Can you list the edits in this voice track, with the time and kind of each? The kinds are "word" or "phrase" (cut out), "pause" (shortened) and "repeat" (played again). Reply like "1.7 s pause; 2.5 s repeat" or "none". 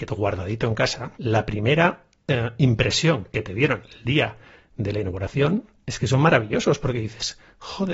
1.1 s pause